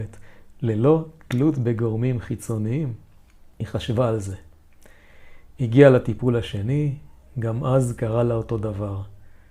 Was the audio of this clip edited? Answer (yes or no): no